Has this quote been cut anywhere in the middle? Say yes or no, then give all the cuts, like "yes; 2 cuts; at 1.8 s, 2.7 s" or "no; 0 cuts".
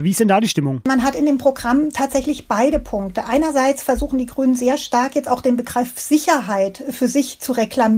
no; 0 cuts